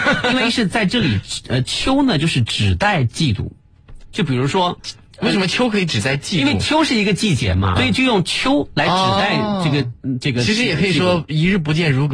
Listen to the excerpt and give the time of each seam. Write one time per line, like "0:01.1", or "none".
0:07.8